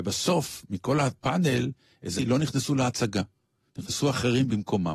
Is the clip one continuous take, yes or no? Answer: no